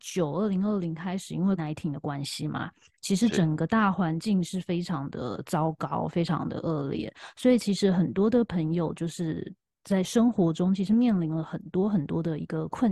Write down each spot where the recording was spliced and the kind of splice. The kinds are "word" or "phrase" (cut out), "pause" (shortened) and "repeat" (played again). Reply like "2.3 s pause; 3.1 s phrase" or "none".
1.6 s word